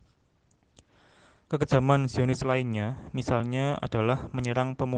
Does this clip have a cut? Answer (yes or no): no